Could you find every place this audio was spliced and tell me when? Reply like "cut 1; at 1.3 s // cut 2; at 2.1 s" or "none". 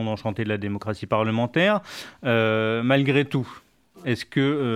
none